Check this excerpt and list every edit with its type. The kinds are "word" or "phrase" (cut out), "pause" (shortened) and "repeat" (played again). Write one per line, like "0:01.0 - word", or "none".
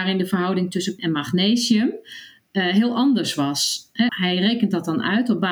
0:01.0 - word
0:04.1 - word

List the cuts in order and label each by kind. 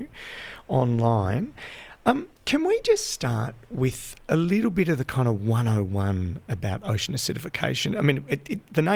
0:02.4 - pause

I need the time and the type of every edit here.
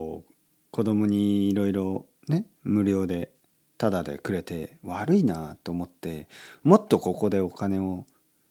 none

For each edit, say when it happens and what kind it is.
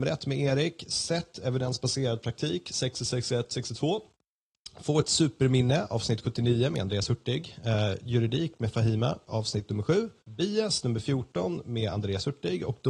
0:10.2 - pause

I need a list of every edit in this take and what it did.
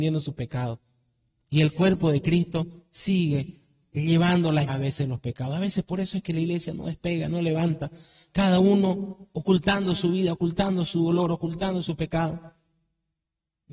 0:04.7 - word

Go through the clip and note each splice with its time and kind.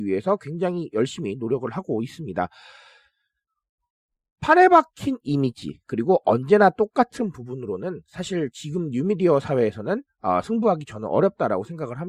none

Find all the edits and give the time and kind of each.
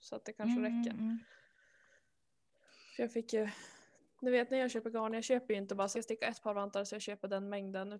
0:05.9 - phrase

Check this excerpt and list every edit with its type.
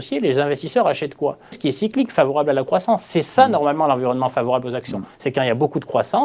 0:01.5 - word

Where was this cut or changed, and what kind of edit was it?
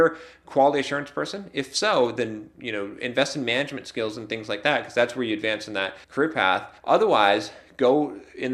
0:06.0 - pause
0:06.8 - pause

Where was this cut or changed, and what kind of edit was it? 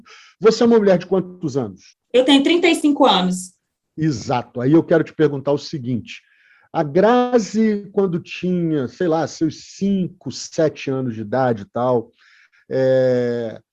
0:01.9 - pause

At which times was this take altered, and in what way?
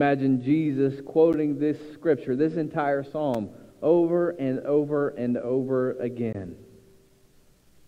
none

